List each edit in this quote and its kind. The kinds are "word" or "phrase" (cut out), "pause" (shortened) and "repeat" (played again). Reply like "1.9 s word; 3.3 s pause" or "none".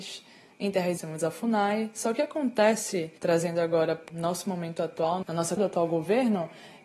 1.0 s word; 3.2 s pause; 4.1 s word; 5.2 s word; 5.6 s word